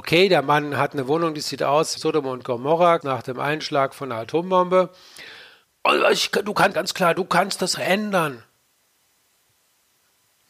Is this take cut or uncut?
cut